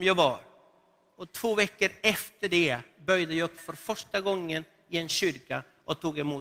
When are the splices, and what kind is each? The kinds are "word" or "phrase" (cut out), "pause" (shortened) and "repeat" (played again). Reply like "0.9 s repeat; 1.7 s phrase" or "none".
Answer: 3.6 s word